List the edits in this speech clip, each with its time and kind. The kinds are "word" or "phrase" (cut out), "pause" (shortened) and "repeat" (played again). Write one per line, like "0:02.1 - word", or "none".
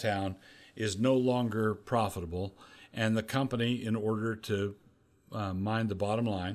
none